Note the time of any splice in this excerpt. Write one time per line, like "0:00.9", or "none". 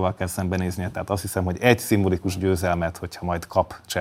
none

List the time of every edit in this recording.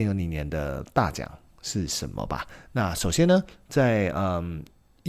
none

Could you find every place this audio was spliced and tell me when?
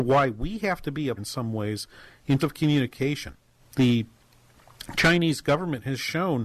0:01.2
0:02.4
0:03.6

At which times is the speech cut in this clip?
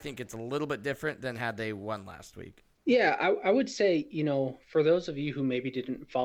none

